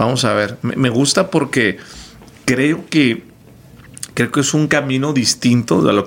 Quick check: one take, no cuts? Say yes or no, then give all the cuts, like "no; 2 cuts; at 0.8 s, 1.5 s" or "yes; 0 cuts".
yes; 0 cuts